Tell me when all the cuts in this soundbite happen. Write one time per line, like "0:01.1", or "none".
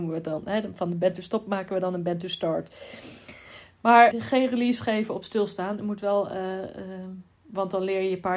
0:04.1